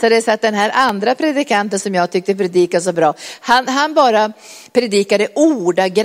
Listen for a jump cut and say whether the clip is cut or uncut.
uncut